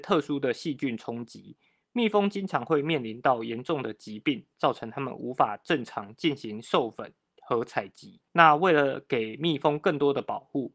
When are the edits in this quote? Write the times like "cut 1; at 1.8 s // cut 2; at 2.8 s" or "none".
cut 1; at 8.3 s